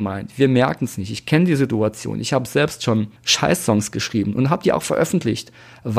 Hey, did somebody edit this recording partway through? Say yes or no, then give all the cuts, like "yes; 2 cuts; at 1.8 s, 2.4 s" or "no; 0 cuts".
yes; 1 cut; at 3.2 s